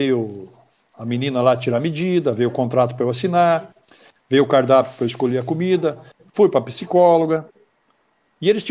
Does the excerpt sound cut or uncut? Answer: uncut